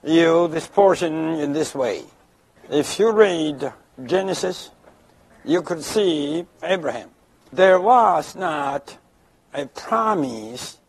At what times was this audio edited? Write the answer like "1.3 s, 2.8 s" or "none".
6.6 s